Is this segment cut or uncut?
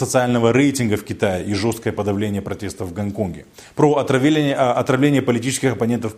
uncut